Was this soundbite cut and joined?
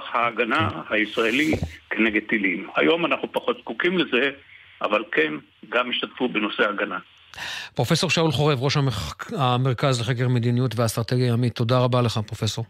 no; 0 cuts

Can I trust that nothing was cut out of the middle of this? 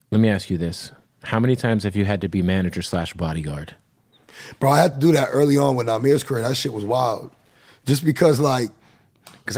yes; 0 cuts

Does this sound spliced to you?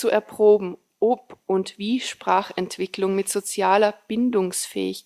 no; 0 cuts

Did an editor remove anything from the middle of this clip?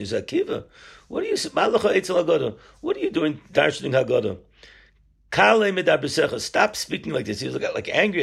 no; 0 cuts

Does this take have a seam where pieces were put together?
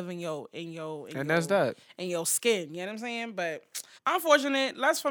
yes; 1 cut; at 4.0 s

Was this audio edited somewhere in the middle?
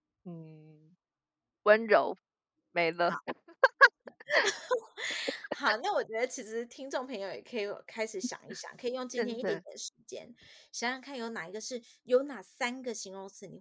no; 0 cuts

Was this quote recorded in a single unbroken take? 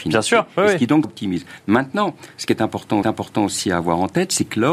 no; 2 cuts; at 1.0 s, 3.0 s

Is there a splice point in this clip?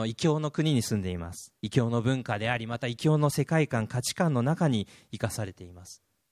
yes; 1 cut; at 1.6 s

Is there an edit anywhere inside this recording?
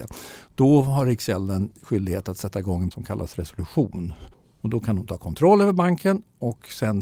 yes; 1 cut; at 2.9 s

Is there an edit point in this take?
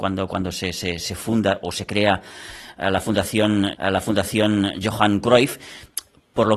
yes; 1 cut; at 3.7 s

